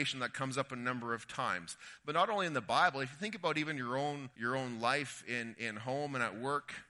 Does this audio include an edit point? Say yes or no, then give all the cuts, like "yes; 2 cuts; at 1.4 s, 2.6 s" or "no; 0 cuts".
yes; 1 cut; at 4.3 s